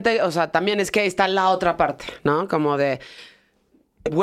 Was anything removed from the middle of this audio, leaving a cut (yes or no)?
no